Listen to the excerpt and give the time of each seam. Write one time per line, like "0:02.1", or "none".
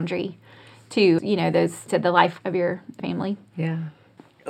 0:01.2
0:01.9
0:02.4
0:03.0